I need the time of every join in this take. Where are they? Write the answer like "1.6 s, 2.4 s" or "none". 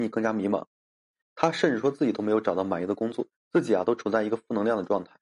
3.3 s